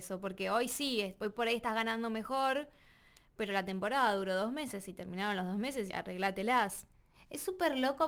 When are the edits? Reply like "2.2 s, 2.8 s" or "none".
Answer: 5.9 s